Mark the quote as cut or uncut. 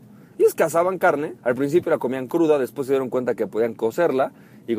cut